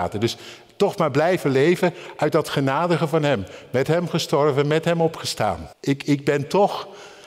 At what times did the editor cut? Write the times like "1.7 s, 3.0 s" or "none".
5.7 s